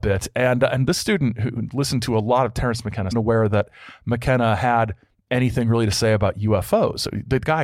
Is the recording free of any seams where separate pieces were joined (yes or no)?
no